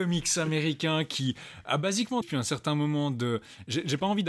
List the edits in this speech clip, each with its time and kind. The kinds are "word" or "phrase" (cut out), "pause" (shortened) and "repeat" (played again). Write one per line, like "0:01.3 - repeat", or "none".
0:02.2 - word